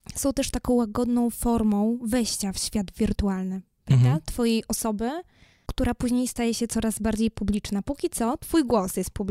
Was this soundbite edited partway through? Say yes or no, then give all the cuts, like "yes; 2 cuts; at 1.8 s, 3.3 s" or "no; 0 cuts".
no; 0 cuts